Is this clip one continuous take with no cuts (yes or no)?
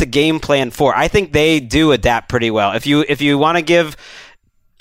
yes